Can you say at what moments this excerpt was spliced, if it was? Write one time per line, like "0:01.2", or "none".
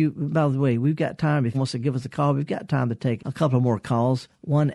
0:01.5
0:03.2